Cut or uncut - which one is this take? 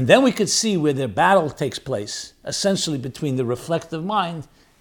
uncut